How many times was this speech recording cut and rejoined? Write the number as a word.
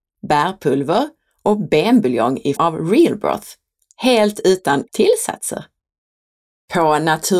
two